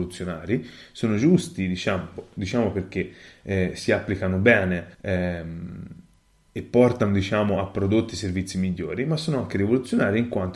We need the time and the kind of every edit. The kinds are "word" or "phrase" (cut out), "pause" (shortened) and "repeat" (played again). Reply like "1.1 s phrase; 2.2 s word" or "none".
4.9 s pause